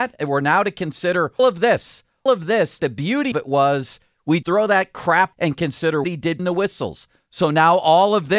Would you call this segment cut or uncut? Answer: cut